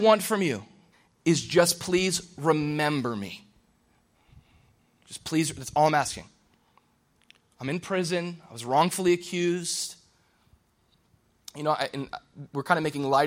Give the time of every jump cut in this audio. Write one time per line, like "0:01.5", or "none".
0:00.9